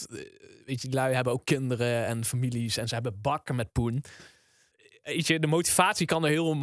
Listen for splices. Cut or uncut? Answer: uncut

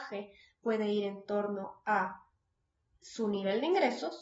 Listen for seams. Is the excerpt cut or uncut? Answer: uncut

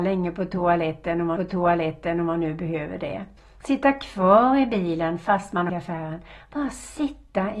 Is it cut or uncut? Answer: cut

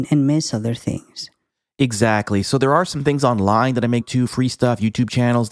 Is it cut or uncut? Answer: cut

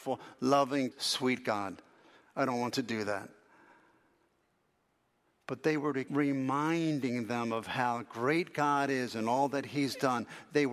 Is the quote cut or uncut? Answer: cut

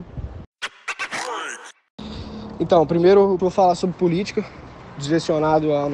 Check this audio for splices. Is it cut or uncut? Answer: cut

